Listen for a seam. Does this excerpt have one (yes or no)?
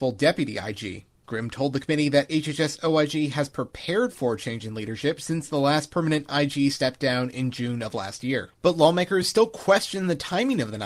no